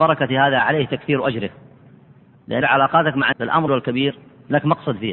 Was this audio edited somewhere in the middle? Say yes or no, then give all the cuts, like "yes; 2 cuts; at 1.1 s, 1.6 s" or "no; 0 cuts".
yes; 3 cuts; at 2.6 s, 3.3 s, 3.7 s